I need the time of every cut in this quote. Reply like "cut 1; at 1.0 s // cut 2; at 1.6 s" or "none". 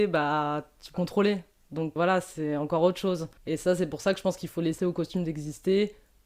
cut 1; at 0.9 s // cut 2; at 2.0 s // cut 3; at 3.4 s // cut 4; at 4.8 s